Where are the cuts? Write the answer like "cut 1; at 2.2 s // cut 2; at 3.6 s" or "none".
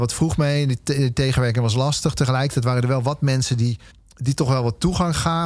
cut 1; at 3.9 s